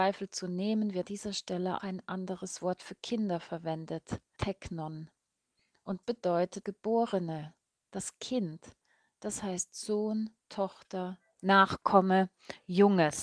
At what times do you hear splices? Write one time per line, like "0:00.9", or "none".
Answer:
0:01.0
0:01.8
0:04.4
0:06.0
0:06.6

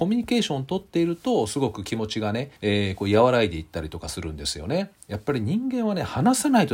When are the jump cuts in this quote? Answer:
0:02.6

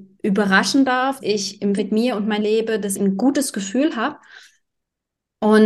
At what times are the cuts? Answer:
0:01.2
0:01.8
0:02.4
0:03.0

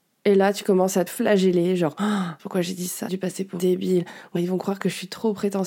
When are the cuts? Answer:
0:01.1
0:02.4
0:03.1
0:03.6
0:04.4

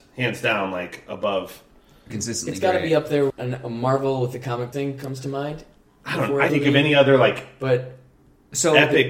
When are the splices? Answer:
0:02.1
0:03.3
0:04.7
0:06.5

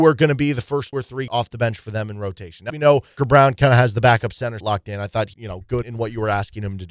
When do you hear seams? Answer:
0:00.9
0:01.3
0:02.7
0:03.2
0:04.6
0:05.3
0:05.8

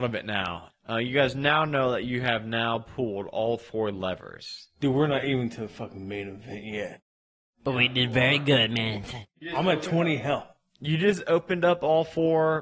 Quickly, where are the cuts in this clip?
none

